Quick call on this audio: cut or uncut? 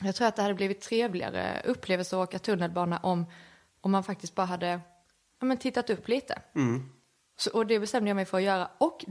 uncut